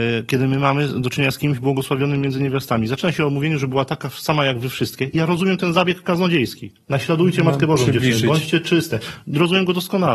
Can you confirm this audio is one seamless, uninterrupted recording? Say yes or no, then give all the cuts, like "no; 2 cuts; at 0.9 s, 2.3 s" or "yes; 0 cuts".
yes; 0 cuts